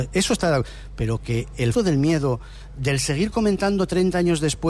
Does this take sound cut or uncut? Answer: cut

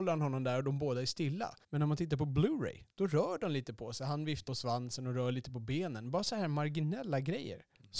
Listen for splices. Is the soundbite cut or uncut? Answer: cut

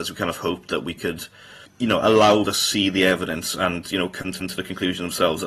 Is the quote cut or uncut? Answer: cut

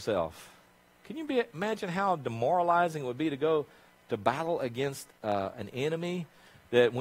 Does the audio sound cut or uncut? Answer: uncut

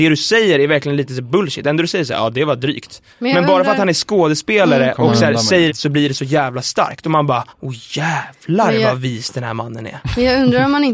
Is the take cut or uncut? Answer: cut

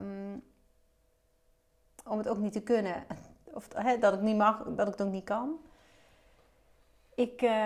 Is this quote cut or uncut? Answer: uncut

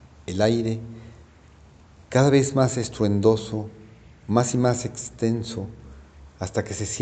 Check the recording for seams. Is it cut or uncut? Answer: uncut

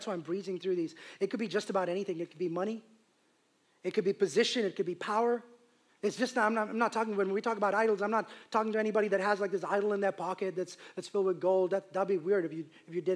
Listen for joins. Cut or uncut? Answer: uncut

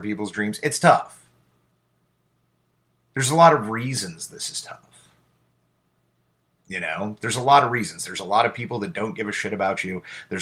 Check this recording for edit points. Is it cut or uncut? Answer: uncut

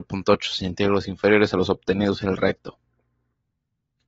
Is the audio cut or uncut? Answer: uncut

